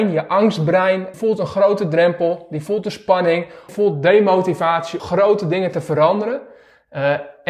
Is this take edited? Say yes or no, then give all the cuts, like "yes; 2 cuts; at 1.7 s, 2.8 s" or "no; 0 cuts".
yes; 3 cuts; at 1.1 s, 3.7 s, 5.0 s